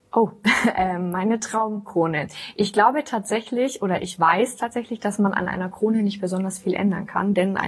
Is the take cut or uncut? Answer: uncut